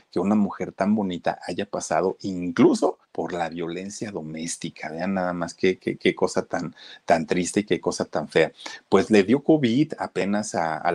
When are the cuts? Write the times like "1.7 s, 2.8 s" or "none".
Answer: 3.0 s